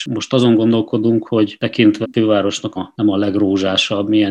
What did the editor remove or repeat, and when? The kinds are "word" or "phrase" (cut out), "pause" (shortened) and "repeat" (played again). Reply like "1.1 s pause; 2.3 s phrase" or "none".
2.0 s word; 2.8 s phrase